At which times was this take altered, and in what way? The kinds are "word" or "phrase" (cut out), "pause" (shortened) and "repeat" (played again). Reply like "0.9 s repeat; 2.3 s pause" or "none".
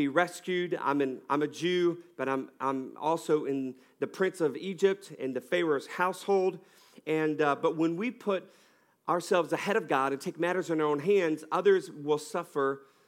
none